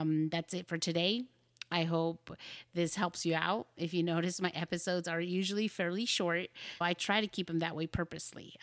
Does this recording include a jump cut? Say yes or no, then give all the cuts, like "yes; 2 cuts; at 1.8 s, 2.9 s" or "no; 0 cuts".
yes; 1 cut; at 6.8 s